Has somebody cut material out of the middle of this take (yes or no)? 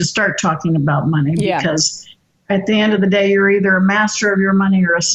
no